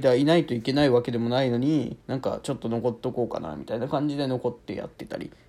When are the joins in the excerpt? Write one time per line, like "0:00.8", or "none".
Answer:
0:02.0

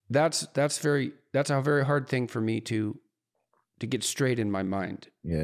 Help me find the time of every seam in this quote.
none

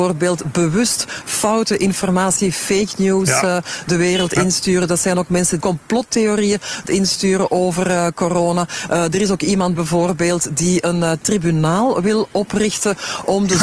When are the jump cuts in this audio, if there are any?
0:05.6
0:06.9
0:09.8

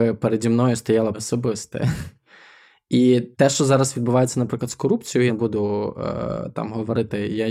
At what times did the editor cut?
0:01.1
0:03.3
0:05.3

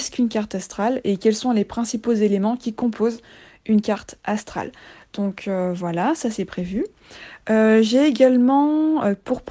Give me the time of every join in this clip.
none

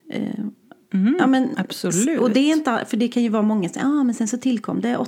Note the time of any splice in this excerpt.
none

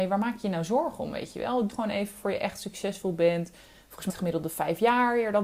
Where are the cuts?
0:01.7
0:04.1

